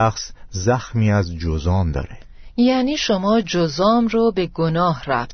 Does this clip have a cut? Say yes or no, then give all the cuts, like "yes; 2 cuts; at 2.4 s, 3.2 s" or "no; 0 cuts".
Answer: no; 0 cuts